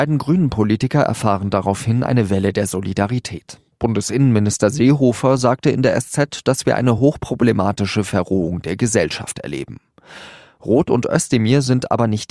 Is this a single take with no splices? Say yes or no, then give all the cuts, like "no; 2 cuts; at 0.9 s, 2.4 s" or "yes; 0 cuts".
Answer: yes; 0 cuts